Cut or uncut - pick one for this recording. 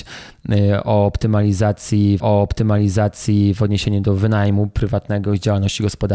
cut